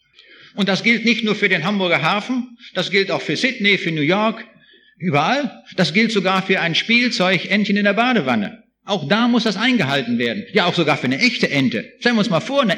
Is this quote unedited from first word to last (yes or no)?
yes